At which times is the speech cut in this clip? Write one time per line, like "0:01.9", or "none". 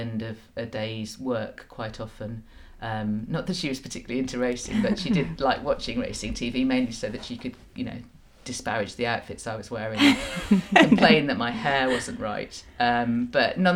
none